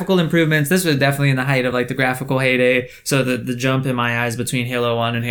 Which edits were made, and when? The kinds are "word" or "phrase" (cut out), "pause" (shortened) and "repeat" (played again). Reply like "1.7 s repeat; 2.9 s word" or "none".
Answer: none